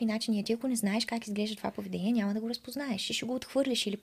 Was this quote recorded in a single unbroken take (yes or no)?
yes